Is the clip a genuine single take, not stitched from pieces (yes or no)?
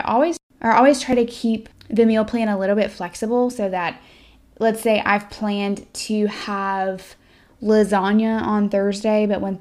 yes